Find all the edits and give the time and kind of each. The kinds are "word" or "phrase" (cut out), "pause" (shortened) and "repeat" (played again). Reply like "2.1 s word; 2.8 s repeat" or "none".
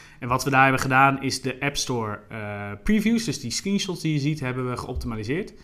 none